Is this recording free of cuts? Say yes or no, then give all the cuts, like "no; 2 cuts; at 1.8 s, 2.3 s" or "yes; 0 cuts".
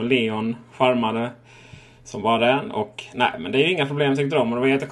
yes; 0 cuts